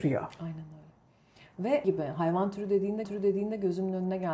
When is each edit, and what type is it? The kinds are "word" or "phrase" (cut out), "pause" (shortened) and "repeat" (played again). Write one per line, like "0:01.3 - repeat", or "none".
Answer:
0:01.8 - word
0:03.0 - repeat